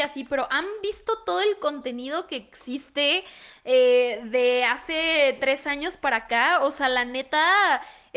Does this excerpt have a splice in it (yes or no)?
no